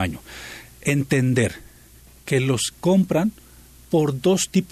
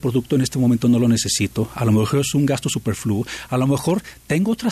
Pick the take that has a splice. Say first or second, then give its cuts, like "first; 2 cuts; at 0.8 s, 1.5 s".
first; 1 cut; at 2.7 s